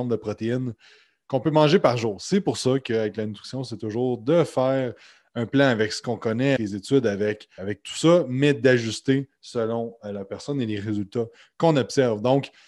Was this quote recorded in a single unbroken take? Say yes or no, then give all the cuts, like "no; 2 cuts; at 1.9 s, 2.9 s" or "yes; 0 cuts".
no; 2 cuts; at 6.6 s, 7.6 s